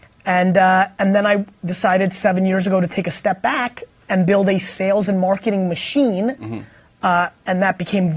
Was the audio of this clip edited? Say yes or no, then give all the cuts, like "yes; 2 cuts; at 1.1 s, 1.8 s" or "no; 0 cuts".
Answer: no; 0 cuts